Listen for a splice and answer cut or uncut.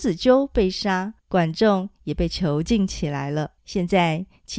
cut